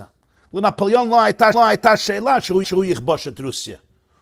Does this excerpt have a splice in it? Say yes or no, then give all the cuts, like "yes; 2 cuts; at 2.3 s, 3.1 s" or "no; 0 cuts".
yes; 2 cuts; at 1.5 s, 2.6 s